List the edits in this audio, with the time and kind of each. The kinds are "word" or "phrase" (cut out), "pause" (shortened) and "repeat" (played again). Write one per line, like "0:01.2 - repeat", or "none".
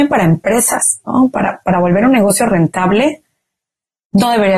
none